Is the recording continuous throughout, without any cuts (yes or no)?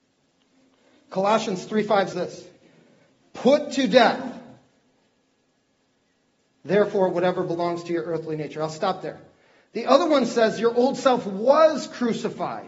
no